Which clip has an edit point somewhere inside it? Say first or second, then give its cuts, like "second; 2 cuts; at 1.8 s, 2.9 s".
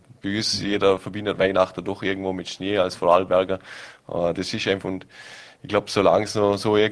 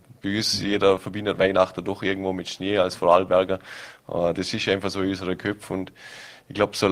first; 1 cut; at 4.8 s